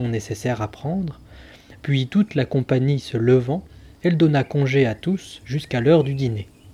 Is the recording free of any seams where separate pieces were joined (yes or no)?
yes